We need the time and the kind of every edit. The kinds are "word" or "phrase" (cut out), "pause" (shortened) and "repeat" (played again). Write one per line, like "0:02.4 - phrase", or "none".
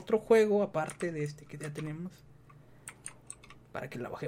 none

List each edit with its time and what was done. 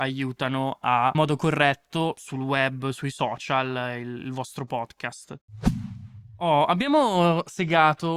0:01.1 - phrase

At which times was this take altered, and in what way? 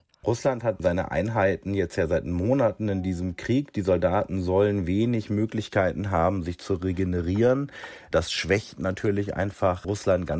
none

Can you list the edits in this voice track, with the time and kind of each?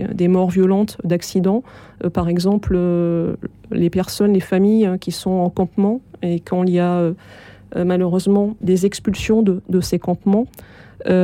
0:08.6 - word

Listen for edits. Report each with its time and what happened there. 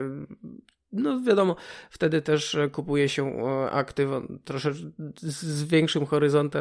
none

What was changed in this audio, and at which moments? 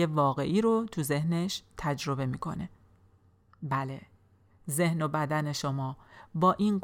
none

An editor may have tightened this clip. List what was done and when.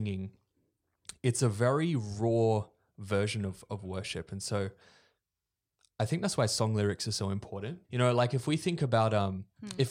0:07.8 - pause

